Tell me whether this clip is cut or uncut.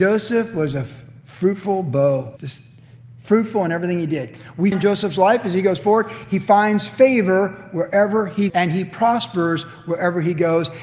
cut